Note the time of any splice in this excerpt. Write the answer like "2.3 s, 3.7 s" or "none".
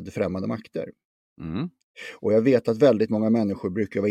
none